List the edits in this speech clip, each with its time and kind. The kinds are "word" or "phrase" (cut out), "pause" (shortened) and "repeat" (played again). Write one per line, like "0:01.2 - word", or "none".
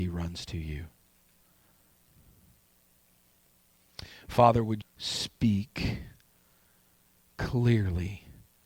0:04.8 - word